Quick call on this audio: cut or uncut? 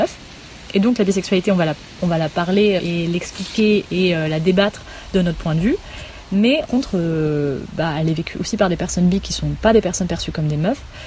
cut